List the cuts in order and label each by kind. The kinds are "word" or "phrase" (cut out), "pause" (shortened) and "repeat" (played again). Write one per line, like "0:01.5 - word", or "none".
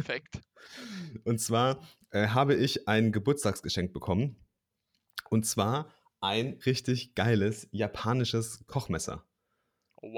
0:06.6 - word